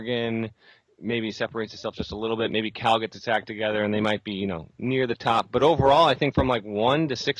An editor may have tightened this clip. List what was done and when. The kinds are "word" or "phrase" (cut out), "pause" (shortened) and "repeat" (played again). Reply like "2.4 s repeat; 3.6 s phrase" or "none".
none

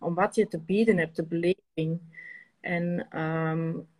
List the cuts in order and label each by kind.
none

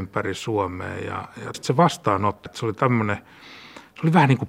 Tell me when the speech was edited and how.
1.5 s phrase; 2.5 s word

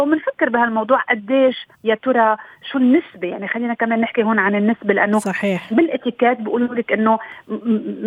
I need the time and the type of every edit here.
1.7 s pause

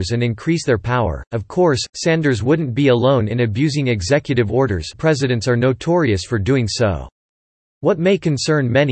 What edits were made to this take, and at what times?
4.9 s word

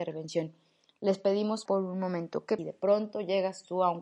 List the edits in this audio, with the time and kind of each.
1.7 s word; 2.6 s phrase

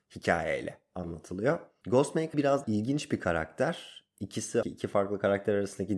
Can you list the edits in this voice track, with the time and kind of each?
2.3 s word; 2.6 s word; 4.6 s word

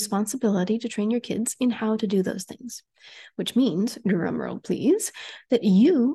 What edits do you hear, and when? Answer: none

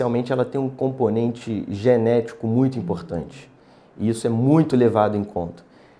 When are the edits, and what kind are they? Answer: none

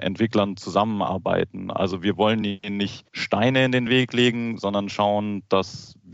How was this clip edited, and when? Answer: none

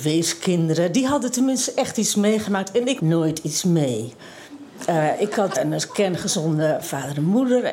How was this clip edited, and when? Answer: 3.0 s word; 5.5 s word

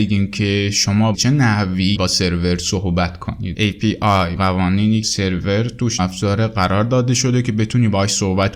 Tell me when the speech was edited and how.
1.1 s word; 1.9 s word; 3.5 s word; 4.4 s word; 5.0 s word; 6.0 s word

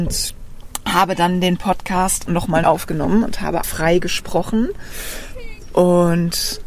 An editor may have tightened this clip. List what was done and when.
2.3 s word; 2.6 s word; 3.6 s word

